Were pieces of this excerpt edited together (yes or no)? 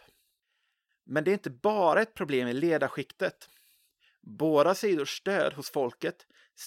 no